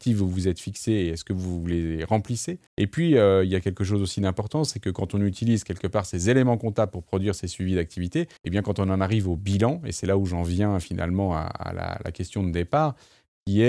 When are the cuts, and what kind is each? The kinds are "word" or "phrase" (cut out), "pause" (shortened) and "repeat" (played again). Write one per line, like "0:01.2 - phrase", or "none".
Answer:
0:02.7 - pause
0:08.4 - pause